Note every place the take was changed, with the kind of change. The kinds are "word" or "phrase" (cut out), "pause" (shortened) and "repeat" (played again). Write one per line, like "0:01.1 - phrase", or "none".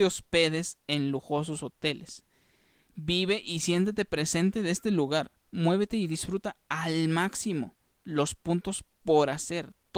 none